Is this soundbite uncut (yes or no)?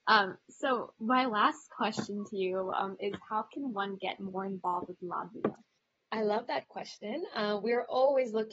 no